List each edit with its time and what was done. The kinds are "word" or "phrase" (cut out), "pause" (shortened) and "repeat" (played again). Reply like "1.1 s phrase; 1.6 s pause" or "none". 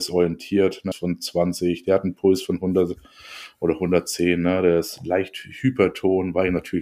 0.9 s phrase